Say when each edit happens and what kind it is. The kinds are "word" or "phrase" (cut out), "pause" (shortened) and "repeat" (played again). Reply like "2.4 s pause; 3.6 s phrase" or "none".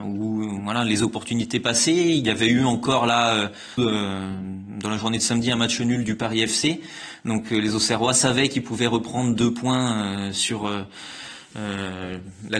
3.8 s phrase; 6.0 s word

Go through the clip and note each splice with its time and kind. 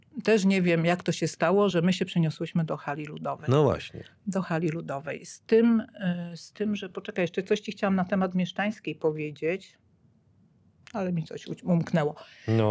none

